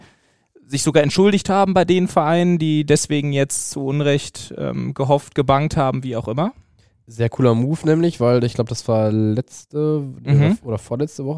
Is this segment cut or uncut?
uncut